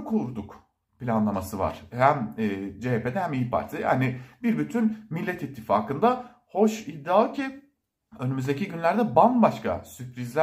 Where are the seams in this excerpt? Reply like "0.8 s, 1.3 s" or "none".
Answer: none

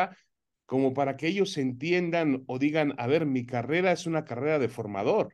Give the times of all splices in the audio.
none

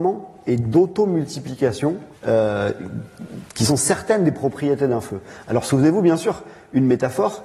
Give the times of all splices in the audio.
2.1 s

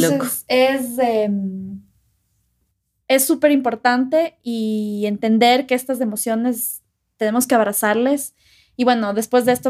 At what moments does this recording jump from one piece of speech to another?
none

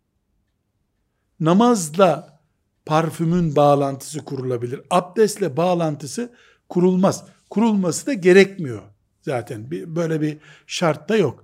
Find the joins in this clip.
none

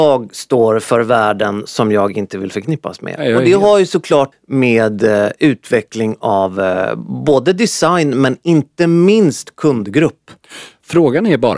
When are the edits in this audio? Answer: 4.3 s

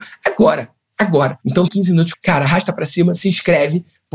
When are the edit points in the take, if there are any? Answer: 1.7 s, 2.1 s

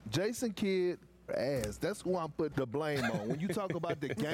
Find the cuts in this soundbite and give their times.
1.3 s, 2.5 s

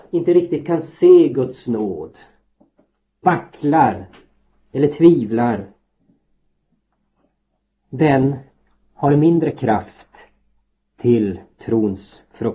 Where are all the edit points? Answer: 3.2 s

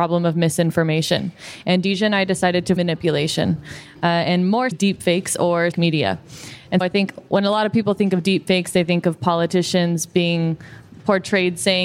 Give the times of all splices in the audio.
2.8 s, 4.7 s, 5.7 s, 6.8 s

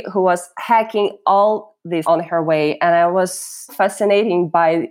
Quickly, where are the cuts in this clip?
2.0 s, 3.7 s

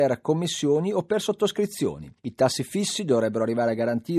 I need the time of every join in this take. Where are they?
none

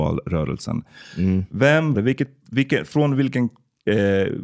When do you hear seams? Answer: 1.9 s

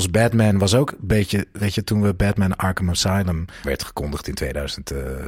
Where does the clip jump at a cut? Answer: 3.6 s

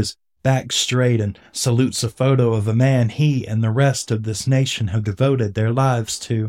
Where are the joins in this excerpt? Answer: none

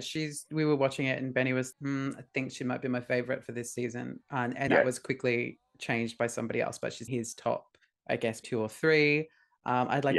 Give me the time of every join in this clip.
1.7 s, 4.2 s, 4.7 s, 7.1 s, 7.8 s, 8.4 s

